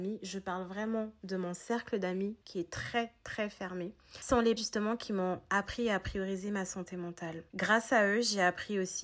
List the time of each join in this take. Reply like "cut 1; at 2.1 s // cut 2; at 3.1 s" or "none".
cut 1; at 2.4 s // cut 2; at 4.6 s // cut 3; at 7.5 s